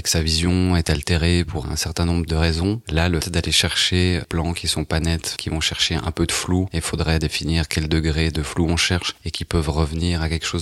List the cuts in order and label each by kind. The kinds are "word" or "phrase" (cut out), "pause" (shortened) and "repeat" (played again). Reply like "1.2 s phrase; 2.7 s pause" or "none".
1.6 s word; 3.2 s word; 4.2 s word; 5.4 s word